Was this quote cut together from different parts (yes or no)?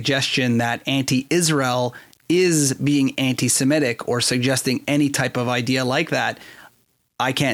no